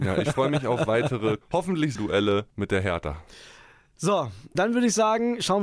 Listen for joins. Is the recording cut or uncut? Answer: cut